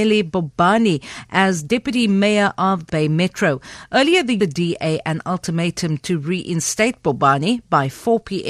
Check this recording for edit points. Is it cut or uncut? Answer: cut